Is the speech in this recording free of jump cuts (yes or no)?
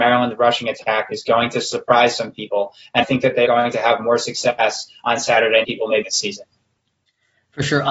no